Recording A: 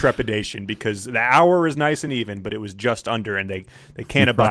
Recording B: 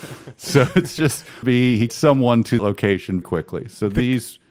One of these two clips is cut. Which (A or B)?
B